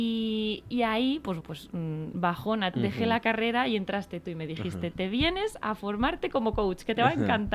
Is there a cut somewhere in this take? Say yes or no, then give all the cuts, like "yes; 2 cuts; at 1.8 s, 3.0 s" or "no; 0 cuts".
yes; 2 cuts; at 1.4 s, 2.7 s